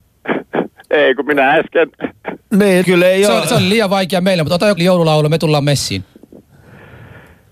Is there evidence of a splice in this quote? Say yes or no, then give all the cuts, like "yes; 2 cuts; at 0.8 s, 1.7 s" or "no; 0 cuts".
yes; 2 cuts; at 2.8 s, 4.8 s